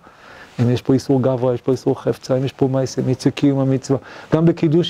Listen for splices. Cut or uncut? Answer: uncut